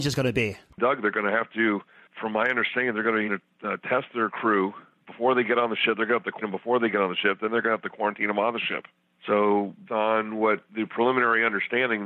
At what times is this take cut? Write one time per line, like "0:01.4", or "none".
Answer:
0:03.3
0:06.4
0:09.9